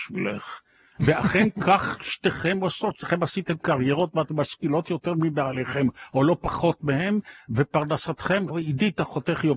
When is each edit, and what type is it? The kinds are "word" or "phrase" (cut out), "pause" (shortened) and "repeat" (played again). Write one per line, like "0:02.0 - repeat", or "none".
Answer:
0:08.5 - word